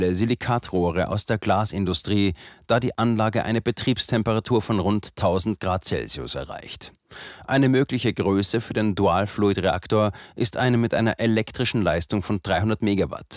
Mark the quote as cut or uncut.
uncut